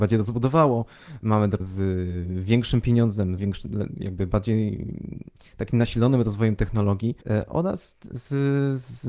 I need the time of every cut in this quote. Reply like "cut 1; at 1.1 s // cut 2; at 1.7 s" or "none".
cut 1; at 1.6 s // cut 2; at 3.4 s // cut 3; at 7.2 s